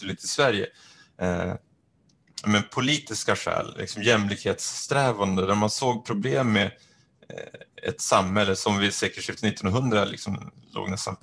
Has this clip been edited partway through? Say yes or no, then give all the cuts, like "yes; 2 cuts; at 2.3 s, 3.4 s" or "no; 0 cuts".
no; 0 cuts